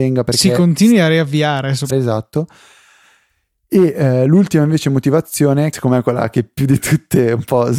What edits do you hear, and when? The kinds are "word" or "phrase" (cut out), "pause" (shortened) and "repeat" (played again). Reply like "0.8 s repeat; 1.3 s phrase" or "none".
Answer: 1.9 s phrase; 5.7 s word

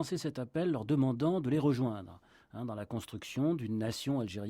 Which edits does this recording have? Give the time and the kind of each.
none

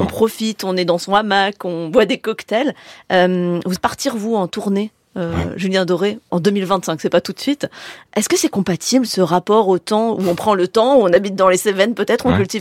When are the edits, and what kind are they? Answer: 3.8 s word; 6.3 s word

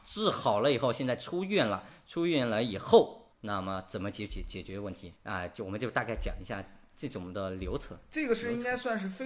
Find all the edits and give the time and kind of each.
3.3 s pause; 5.2 s pause

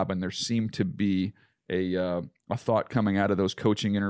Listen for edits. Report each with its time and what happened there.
none

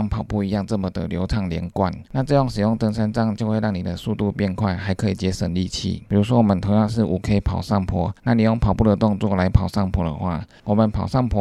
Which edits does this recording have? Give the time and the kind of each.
8.2 s pause

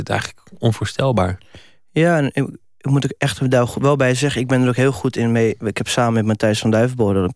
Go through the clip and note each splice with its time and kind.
none

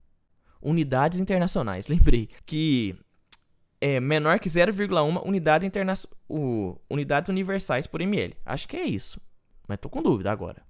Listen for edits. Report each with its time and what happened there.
2.4 s pause

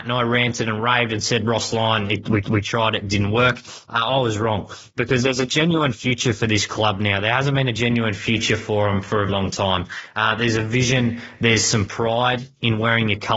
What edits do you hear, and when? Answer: 2.4 s repeat; 9.3 s word

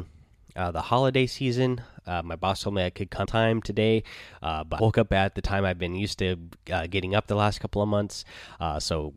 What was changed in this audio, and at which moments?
3.3 s phrase; 4.8 s word

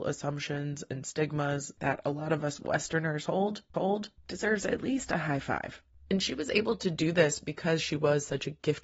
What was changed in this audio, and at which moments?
3.7 s repeat

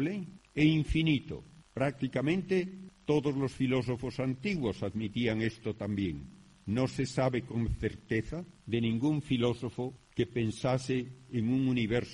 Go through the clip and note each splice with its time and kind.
none

